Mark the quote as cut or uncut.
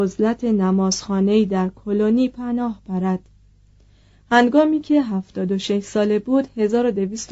uncut